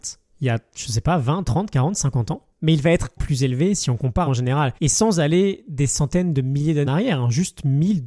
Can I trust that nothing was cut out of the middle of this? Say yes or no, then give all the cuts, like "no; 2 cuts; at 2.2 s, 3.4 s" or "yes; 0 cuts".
no; 5 cuts; at 2.5 s, 3.2 s, 4.3 s, 4.8 s, 6.9 s